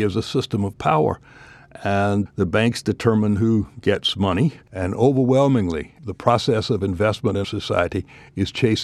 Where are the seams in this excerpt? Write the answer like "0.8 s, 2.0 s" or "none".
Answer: 2.3 s, 7.4 s

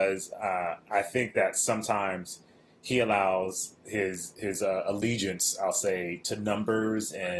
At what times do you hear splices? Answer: none

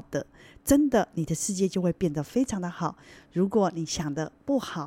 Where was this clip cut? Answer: none

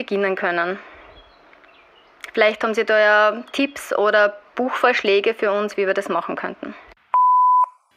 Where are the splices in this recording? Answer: none

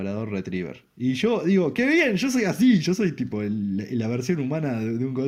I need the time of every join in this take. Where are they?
none

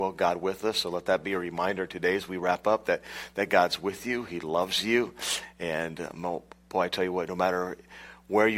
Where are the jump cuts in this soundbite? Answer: none

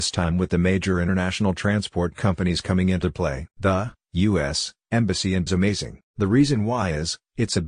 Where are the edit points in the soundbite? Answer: 3.5 s, 5.5 s, 6.1 s

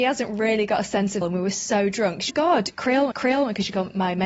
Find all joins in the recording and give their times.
1.2 s, 2.3 s, 3.1 s

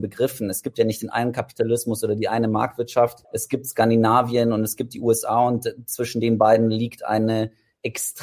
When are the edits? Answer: 3.2 s

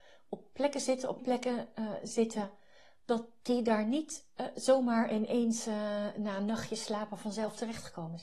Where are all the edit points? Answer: 1.2 s

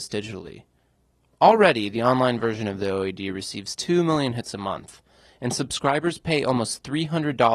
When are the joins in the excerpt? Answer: none

